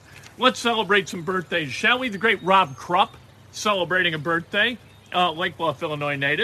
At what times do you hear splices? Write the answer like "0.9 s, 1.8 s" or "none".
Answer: none